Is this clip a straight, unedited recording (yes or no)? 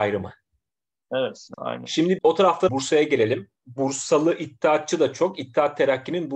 no